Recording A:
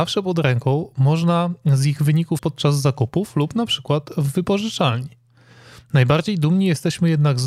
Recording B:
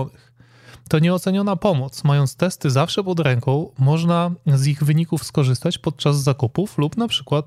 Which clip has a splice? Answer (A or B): A